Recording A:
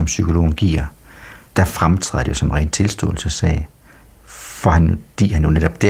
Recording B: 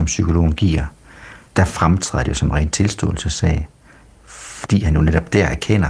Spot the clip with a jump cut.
B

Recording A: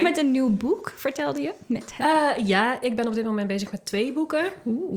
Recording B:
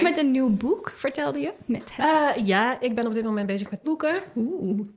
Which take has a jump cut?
B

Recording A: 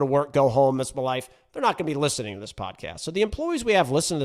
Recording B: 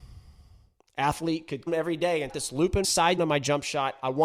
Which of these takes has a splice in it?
B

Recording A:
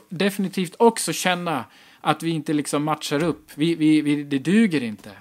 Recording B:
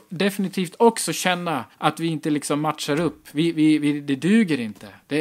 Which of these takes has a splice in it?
B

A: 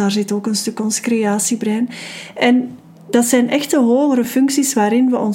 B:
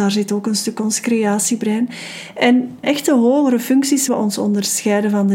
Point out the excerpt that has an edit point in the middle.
B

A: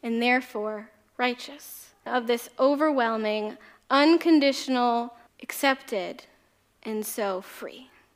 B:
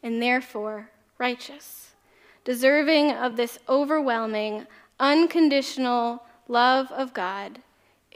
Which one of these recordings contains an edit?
A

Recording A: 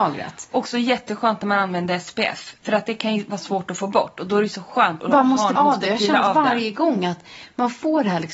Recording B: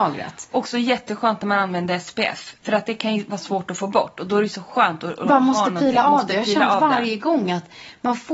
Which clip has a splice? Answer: A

